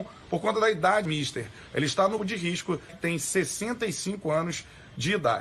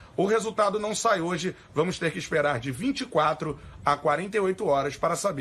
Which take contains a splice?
first; 3 cuts; at 1.0 s, 2.2 s, 2.9 s

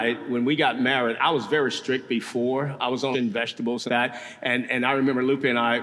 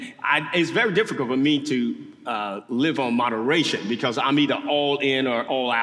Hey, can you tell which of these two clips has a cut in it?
first; 2 cuts; at 3.1 s, 3.9 s

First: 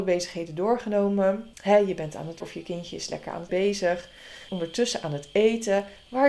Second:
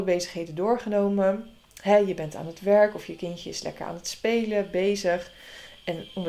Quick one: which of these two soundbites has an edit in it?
first; 4 cuts; at 1.5 s, 2.4 s, 3.5 s, 4.5 s

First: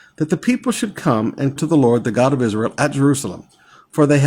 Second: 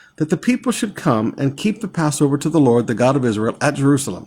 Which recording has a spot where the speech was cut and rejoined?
first; 1 cut; at 1.6 s

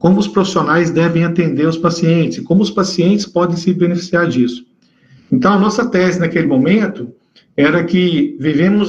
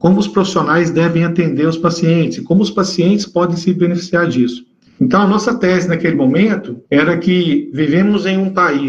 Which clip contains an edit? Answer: second; 2 cuts; at 4.9 s, 6.9 s

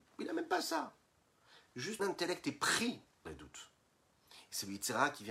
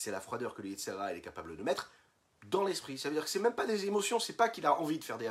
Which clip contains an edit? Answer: first; 2 cuts; at 2.0 s, 3.3 s

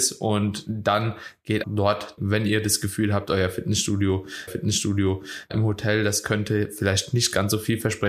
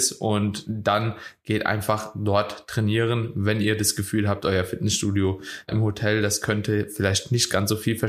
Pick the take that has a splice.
first; 3 cuts; at 1.6 s, 2.2 s, 4.5 s

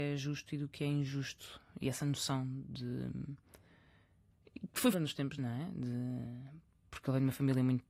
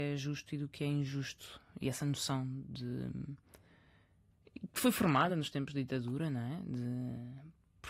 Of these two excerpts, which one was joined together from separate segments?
first; 2 cuts; at 4.9 s, 5.4 s

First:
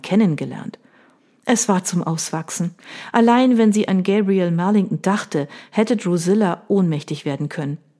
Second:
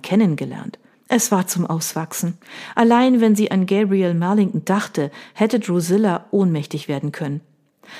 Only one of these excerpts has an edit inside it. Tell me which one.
second; 1 cut; at 0.9 s

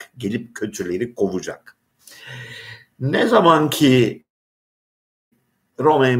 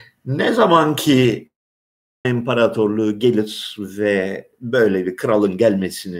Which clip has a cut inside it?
second; 1 cut; at 2.2 s

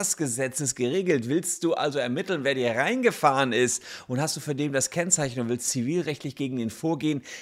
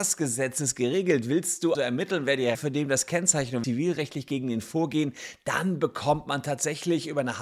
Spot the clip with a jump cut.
second; 3 cuts; at 1.7 s, 2.5 s, 3.6 s

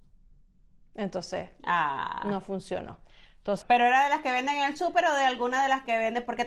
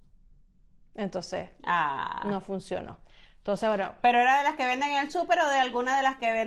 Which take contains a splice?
first; 1 cut; at 3.6 s

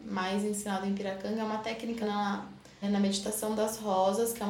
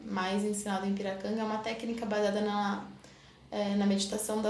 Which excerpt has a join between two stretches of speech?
first; 2 cuts; at 2.0 s, 2.8 s

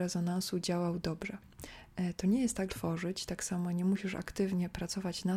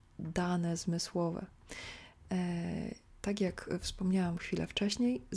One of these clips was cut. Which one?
first; 1 cut; at 2.7 s

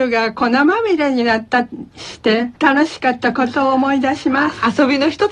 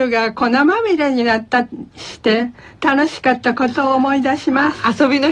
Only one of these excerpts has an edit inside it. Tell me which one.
first; 1 cut; at 2.6 s

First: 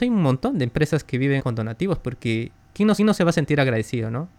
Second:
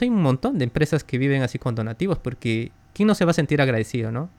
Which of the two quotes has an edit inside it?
first; 2 cuts; at 1.4 s, 3.0 s

